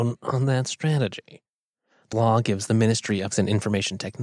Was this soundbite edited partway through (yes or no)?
yes